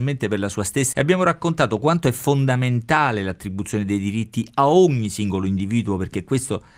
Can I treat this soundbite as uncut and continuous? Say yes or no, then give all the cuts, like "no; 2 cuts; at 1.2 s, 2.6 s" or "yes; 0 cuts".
no; 1 cut; at 0.9 s